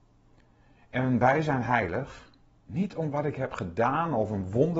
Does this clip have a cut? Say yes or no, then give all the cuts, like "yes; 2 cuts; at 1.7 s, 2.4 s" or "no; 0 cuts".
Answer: no; 0 cuts